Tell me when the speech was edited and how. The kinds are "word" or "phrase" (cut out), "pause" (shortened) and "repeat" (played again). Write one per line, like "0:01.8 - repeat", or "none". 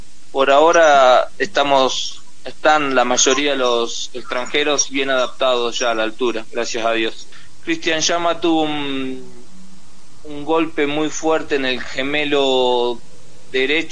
none